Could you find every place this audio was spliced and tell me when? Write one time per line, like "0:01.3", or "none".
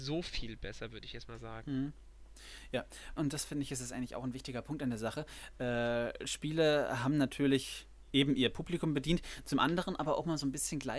0:03.2

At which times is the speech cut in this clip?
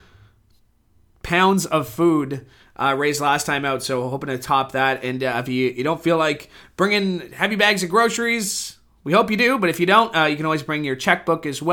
none

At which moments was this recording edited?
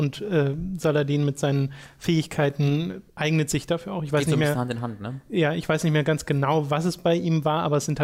0:03.1

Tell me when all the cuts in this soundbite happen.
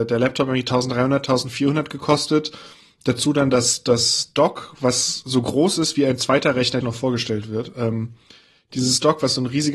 0:06.8

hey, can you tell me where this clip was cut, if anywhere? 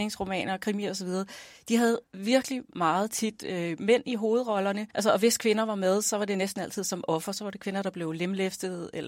0:02.0
0:04.9

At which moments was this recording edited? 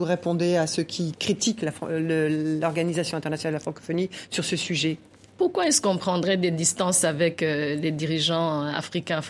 none

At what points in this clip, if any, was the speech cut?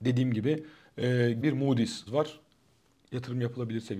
0:01.4
0:02.1

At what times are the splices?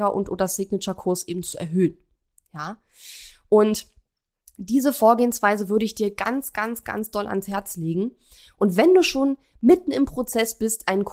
none

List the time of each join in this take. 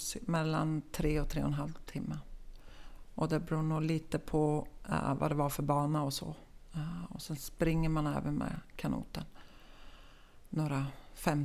none

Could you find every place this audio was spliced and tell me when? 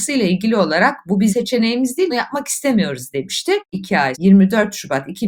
0:01.3
0:02.1
0:04.1

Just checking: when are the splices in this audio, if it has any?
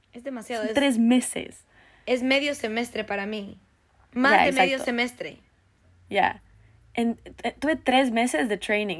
none

